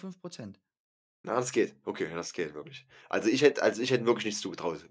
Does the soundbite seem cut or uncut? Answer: uncut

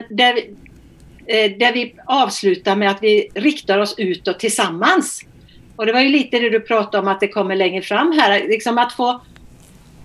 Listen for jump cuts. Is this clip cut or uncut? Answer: uncut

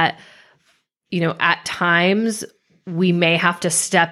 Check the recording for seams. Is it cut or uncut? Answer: uncut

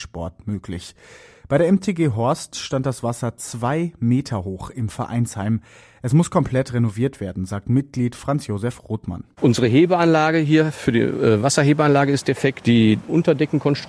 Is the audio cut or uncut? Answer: uncut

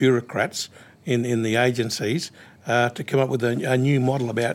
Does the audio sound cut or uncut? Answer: uncut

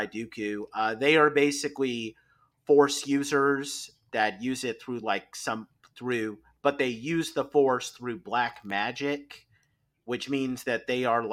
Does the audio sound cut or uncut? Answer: uncut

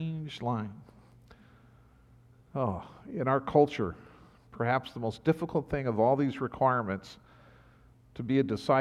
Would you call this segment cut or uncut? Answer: uncut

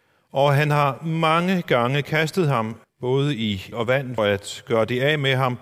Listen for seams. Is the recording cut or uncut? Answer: cut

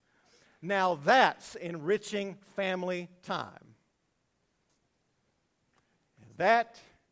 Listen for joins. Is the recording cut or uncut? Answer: uncut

